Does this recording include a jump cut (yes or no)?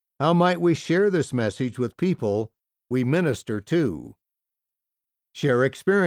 no